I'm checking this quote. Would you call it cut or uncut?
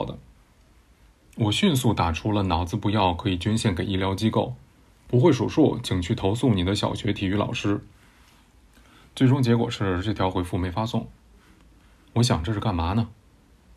uncut